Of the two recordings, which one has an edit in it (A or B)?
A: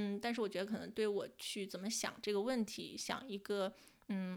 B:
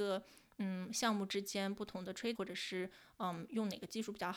B